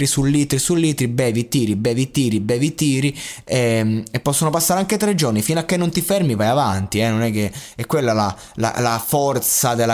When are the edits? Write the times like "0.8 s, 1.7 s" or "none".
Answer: none